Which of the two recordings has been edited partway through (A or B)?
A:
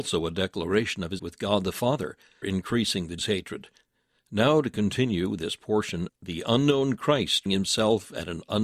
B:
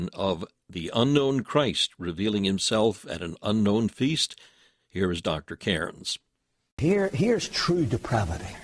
A